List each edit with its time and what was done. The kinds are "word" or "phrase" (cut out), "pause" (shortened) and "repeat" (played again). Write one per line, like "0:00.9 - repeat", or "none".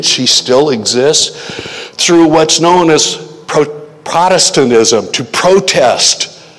none